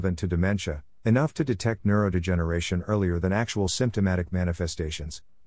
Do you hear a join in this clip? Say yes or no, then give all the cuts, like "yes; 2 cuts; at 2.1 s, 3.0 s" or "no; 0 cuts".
no; 0 cuts